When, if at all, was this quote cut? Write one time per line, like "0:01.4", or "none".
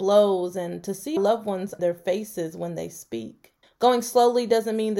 0:01.2
0:01.8
0:03.6